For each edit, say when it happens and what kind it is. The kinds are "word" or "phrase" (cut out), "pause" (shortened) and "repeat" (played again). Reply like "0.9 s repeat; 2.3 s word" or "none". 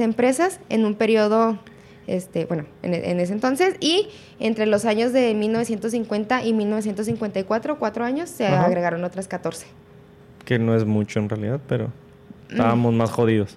12.4 s word

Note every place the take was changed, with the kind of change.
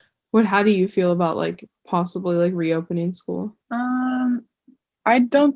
3.6 s pause

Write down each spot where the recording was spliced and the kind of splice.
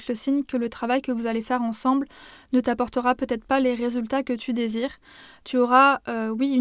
none

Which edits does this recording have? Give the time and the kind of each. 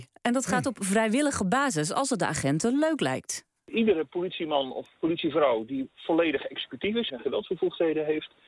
7.1 s phrase

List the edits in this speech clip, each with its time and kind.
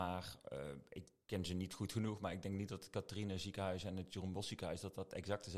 1.2 s word

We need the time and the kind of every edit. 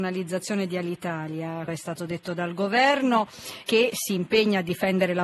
1.7 s word; 3.6 s word

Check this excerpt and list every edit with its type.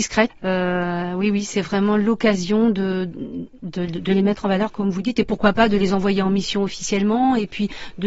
3.6 s pause

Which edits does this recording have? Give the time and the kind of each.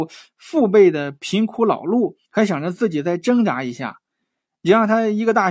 2.2 s pause

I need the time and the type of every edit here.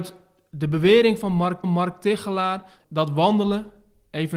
1.6 s repeat

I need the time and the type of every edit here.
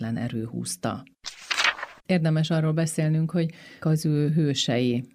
2.0 s pause; 3.8 s word

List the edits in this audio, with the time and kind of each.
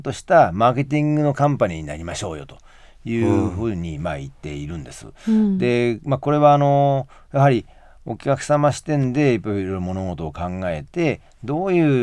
none

